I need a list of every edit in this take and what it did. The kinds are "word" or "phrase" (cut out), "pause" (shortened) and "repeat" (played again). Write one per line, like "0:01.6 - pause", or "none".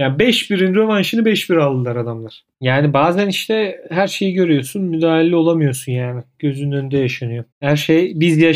0:02.5 - pause
0:07.5 - pause